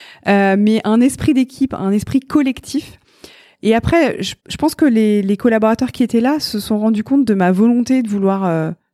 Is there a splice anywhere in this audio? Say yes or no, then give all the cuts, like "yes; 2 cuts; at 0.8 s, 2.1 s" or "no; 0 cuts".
yes; 1 cut; at 4.4 s